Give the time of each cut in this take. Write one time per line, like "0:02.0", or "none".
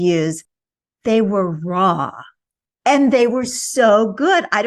none